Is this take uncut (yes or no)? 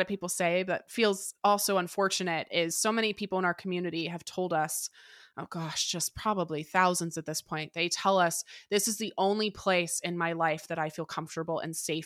yes